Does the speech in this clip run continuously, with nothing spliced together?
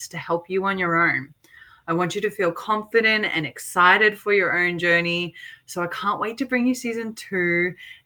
yes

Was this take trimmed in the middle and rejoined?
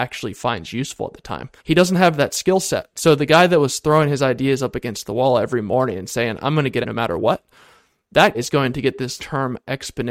yes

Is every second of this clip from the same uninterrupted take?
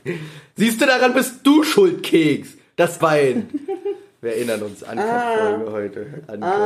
no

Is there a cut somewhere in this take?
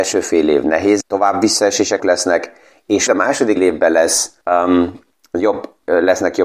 yes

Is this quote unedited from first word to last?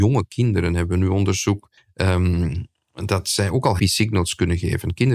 no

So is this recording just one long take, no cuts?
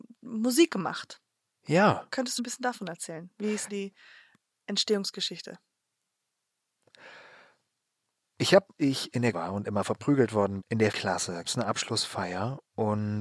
no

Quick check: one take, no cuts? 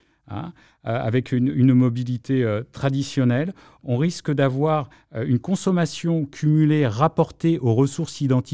yes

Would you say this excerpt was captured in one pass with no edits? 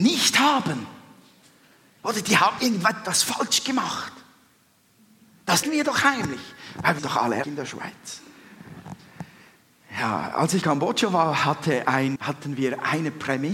no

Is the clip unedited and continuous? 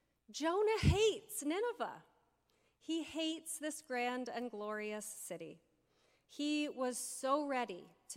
yes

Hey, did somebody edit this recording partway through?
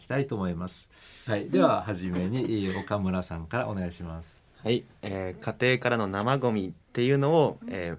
no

